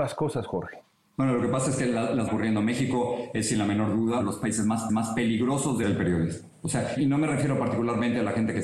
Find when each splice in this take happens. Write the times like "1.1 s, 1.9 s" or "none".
2.3 s, 4.2 s, 4.9 s, 5.8 s, 7.0 s